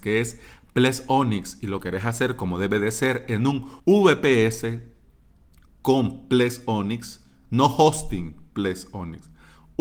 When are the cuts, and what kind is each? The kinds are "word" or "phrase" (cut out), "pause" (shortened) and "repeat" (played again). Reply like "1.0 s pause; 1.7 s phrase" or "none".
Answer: 3.8 s pause